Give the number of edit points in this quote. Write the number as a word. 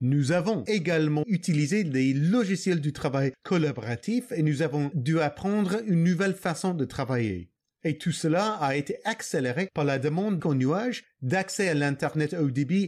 three